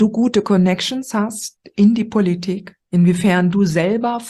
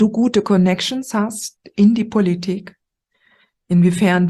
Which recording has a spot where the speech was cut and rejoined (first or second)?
first